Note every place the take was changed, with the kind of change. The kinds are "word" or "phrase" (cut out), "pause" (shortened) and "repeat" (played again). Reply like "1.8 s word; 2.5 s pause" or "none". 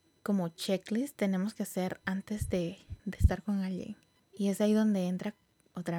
3.0 s pause; 4.2 s pause